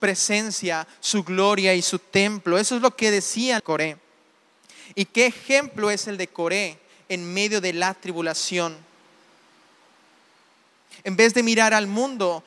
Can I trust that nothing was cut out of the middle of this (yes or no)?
no